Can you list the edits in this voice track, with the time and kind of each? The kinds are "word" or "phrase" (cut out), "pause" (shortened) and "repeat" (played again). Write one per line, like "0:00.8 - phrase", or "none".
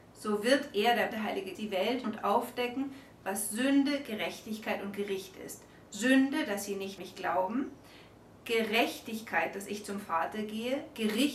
0:01.1 - word
0:01.5 - word
0:02.0 - word
0:07.0 - word